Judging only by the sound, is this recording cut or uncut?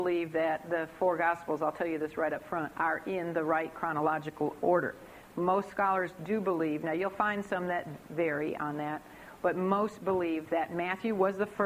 uncut